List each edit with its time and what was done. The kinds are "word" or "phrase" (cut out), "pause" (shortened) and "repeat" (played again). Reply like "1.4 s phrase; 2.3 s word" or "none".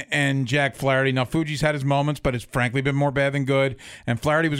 none